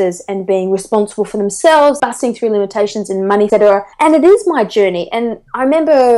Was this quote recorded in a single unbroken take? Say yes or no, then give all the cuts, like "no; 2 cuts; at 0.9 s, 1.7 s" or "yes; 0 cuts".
no; 3 cuts; at 2.0 s, 3.5 s, 3.9 s